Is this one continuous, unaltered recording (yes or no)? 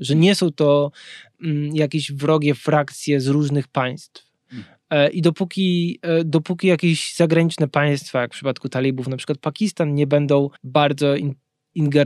no